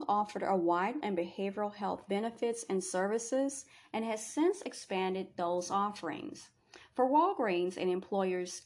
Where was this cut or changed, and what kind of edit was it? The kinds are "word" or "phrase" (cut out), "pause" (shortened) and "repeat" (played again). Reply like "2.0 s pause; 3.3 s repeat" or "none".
1.0 s phrase

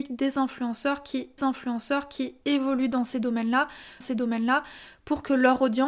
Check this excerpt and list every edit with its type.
1.4 s repeat; 4.0 s repeat

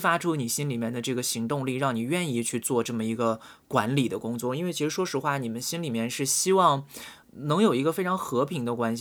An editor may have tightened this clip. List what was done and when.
7.2 s word

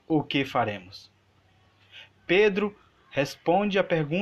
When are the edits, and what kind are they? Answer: none

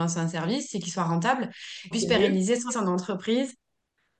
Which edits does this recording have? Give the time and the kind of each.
1.9 s phrase; 2.7 s word

